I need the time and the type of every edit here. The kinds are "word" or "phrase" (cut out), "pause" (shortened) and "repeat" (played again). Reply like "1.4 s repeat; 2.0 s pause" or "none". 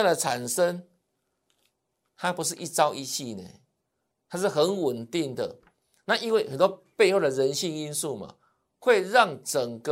none